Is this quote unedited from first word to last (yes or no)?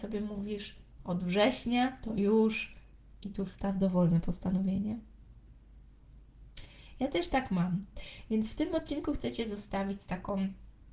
yes